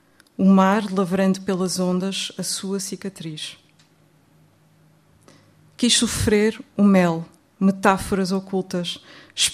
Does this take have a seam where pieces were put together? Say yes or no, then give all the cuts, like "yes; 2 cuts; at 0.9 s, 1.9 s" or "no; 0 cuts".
no; 0 cuts